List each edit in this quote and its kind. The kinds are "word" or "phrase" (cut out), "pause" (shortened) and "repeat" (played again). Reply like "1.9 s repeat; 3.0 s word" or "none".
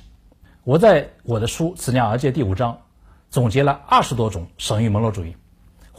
none